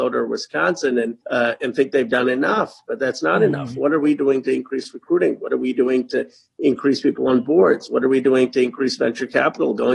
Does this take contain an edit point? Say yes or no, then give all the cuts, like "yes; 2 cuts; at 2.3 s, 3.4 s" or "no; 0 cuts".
yes; 1 cut; at 1.2 s